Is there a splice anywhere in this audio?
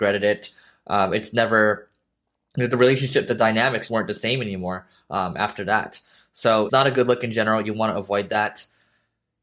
yes; 2 cuts; at 3.9 s, 6.7 s

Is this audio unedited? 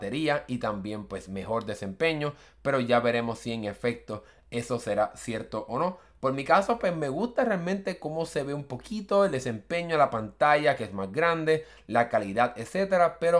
yes; 0 cuts

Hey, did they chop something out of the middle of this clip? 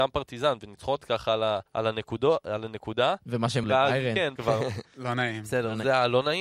yes; 5 cuts; at 1.0 s, 1.7 s, 3.2 s, 3.6 s, 4.4 s

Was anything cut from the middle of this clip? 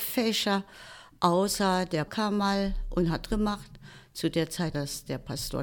yes; 3 cuts; at 2.1 s, 3.3 s, 4.7 s

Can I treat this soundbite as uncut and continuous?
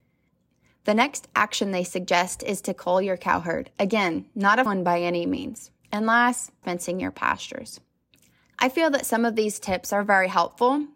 no; 4 cuts; at 4.7 s, 5.8 s, 6.6 s, 8.0 s

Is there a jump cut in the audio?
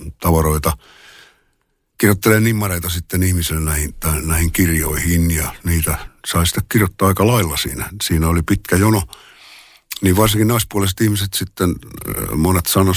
yes; 1 cut; at 6.2 s

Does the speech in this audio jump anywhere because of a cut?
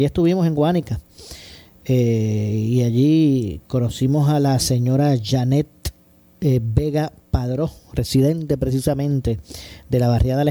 no; 0 cuts

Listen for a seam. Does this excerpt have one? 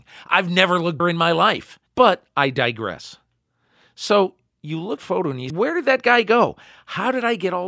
yes; 4 cuts; at 1.0 s, 1.9 s, 5.0 s, 5.5 s

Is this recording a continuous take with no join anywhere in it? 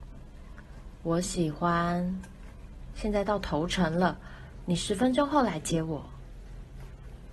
no; 1 cut; at 2.9 s

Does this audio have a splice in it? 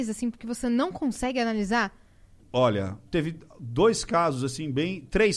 yes; 1 cut; at 3.1 s

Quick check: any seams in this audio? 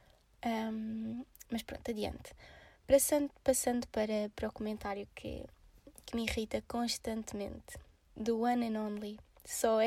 no; 0 cuts

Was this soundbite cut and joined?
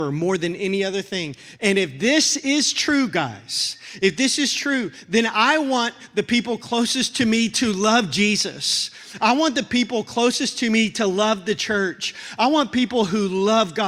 no; 0 cuts

